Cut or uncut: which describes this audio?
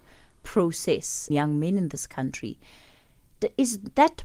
cut